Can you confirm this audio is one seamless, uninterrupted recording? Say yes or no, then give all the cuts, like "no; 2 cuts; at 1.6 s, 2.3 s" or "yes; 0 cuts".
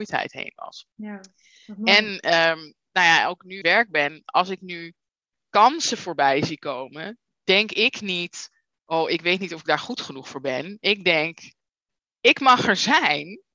no; 2 cuts; at 0.9 s, 3.6 s